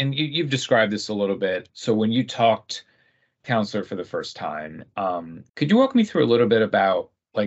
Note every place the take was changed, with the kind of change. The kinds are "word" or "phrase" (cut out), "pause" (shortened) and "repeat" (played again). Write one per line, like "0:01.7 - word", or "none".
0:01.7 - word
0:03.4 - phrase
0:05.5 - pause